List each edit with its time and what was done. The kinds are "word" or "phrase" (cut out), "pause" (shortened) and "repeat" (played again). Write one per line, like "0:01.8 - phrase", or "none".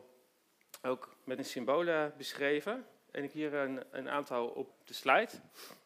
0:01.4 - word
0:03.3 - word
0:04.7 - word